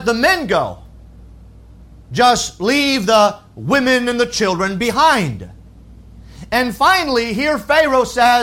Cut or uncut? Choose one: uncut